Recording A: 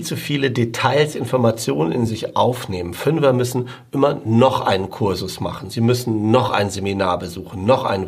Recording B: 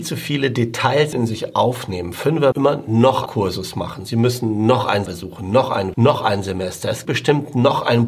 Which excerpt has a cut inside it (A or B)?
B